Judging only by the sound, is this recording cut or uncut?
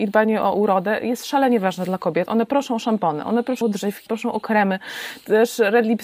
cut